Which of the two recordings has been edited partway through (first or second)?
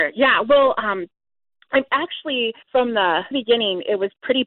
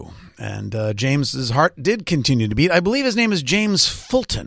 first